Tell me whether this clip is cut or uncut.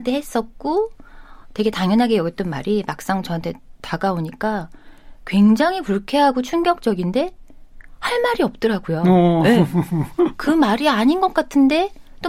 uncut